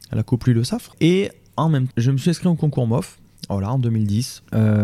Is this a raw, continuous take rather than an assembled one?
no; 1 cut; at 1.9 s

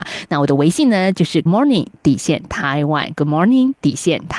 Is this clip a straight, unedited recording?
no; 1 cut; at 1.5 s

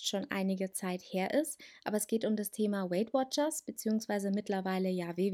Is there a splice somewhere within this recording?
no; 0 cuts

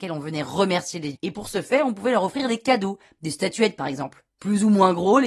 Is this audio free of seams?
no; 1 cut; at 1.1 s

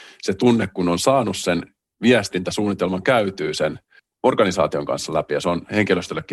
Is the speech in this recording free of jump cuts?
yes; 0 cuts

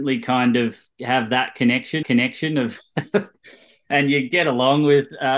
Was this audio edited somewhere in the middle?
yes; 2 cuts; at 2.0 s, 3.3 s

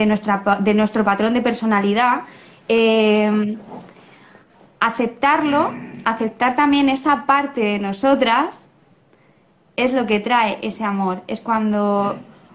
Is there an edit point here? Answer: no; 0 cuts

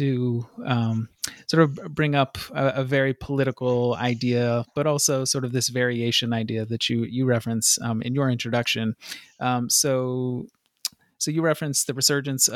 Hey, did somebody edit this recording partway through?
no; 0 cuts

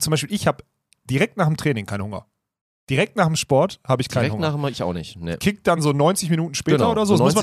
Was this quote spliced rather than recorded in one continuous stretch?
no; 0 cuts

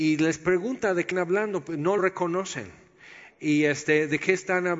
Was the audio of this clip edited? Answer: yes; 2 cuts; at 1.1 s, 2.0 s

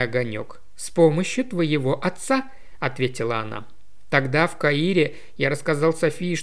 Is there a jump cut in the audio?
no; 0 cuts

